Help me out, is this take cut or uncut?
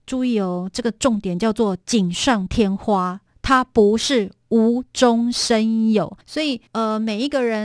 cut